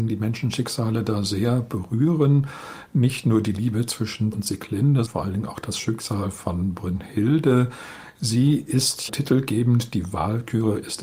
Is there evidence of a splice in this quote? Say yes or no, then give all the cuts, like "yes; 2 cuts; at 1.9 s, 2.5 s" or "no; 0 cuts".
yes; 3 cuts; at 4.3 s, 5.0 s, 9.1 s